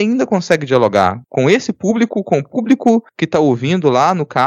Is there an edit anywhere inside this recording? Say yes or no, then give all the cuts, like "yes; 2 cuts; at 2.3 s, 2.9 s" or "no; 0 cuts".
no; 0 cuts